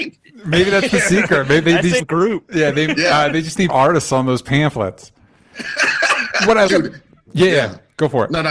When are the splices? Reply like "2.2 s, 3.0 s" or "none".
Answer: 2.0 s, 3.7 s, 6.7 s